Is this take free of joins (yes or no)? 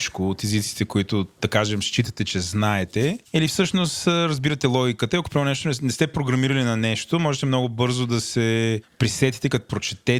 yes